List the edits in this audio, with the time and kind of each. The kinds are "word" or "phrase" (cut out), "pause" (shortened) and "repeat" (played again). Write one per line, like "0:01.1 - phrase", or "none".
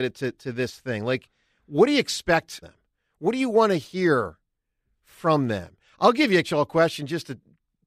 0:02.6 - word
0:06.4 - word